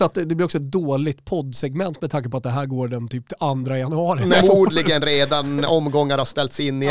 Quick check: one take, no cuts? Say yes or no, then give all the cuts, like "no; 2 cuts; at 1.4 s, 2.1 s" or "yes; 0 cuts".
no; 1 cut; at 4.4 s